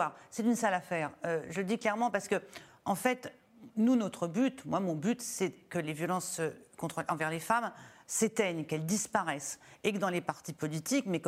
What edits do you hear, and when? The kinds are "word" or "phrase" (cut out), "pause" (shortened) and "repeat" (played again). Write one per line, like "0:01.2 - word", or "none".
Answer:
none